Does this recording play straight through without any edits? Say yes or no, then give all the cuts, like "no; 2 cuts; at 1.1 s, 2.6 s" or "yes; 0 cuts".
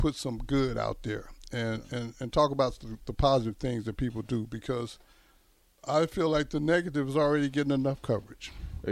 yes; 0 cuts